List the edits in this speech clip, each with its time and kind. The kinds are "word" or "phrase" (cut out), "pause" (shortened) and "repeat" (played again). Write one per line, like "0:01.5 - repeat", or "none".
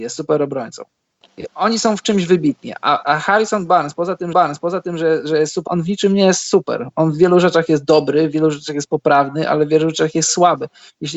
0:03.0 - word
0:04.3 - repeat
0:05.7 - word